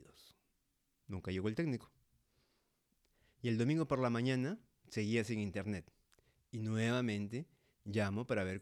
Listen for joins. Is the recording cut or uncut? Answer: uncut